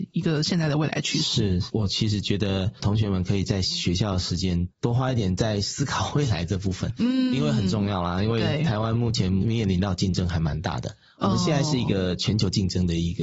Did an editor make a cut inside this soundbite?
no; 0 cuts

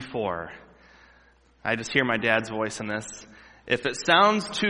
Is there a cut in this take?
no; 0 cuts

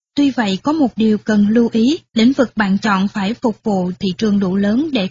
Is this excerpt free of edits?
no; 2 cuts; at 2.1 s, 4.0 s

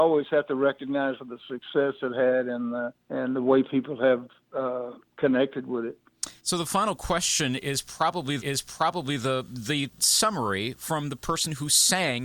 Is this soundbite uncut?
no; 5 cuts; at 1.2 s, 3.0 s, 6.4 s, 8.4 s, 10.0 s

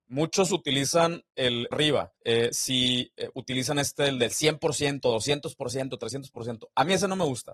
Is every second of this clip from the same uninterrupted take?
no; 2 cuts; at 1.7 s, 2.2 s

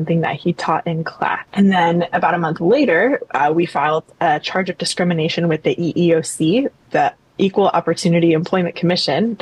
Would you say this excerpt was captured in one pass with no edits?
no; 1 cut; at 1.5 s

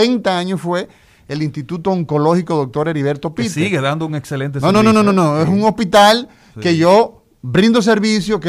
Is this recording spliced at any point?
no; 0 cuts

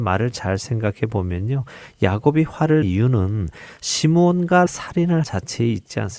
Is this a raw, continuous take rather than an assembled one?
no; 3 cuts; at 2.8 s, 4.7 s, 5.2 s

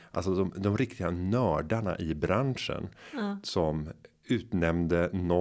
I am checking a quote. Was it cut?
no; 0 cuts

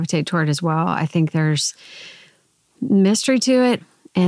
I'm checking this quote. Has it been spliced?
no; 0 cuts

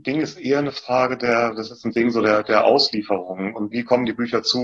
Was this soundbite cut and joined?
yes; 2 cuts; at 1.9 s, 3.7 s

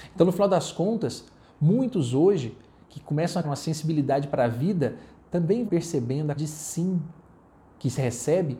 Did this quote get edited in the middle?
yes; 3 cuts; at 3.4 s, 5.7 s, 6.4 s

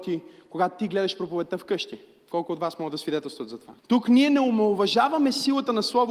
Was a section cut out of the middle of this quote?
yes; 1 cut; at 3.8 s

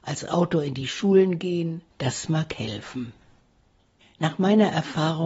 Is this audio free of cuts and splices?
no; 1 cut; at 1.9 s

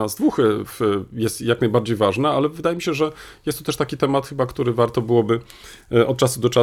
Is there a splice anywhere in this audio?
no; 0 cuts

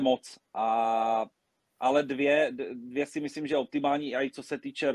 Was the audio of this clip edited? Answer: no; 0 cuts

